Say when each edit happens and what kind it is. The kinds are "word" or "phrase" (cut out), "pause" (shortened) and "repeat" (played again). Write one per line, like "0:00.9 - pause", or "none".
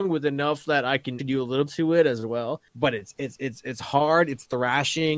0:01.2 - word
0:01.7 - phrase
0:02.7 - pause

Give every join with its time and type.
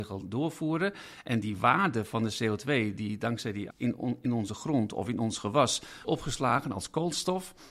0:03.7 - word
0:06.0 - word

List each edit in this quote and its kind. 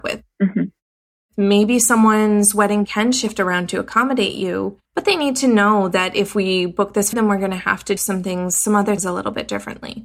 0:02.8 - word
0:04.8 - pause
0:07.1 - word
0:08.0 - word
0:09.0 - word

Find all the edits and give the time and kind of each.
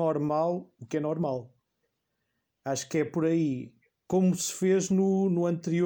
none

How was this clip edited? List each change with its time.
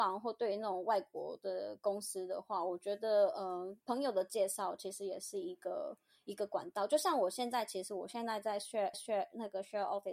0:03.8 - pause
0:08.9 - repeat

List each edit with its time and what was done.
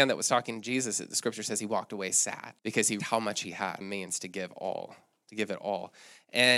0:02.6 - pause
0:03.0 - word
0:03.8 - phrase

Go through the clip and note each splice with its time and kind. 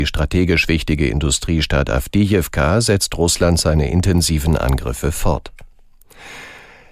none

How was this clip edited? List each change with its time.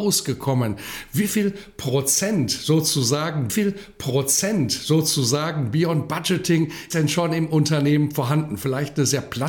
0:03.5 - repeat
0:06.9 - word

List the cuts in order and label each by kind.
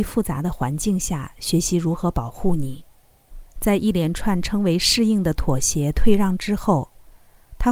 0:03.5 - pause

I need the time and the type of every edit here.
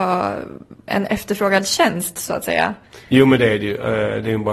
none

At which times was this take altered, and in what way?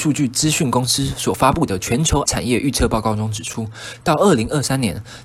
0:02.3 - word

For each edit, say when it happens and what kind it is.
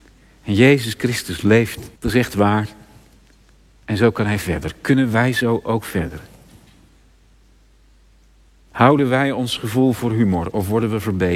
0:02.0 - pause

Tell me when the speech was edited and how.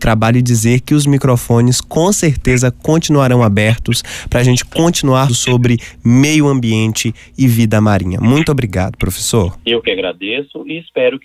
0:05.3 - word

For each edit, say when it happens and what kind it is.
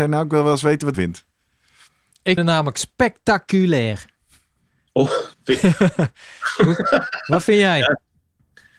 0:00.9 - phrase
0:02.4 - word
0:05.3 - pause

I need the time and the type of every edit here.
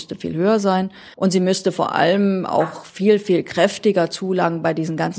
0:01.1 - pause

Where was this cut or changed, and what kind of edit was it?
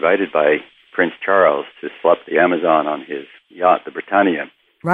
0:02.0 - word

